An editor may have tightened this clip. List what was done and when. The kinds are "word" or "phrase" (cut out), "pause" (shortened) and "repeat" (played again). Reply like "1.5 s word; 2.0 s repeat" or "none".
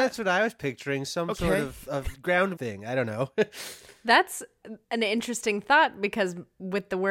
2.1 s word; 2.6 s phrase; 4.8 s pause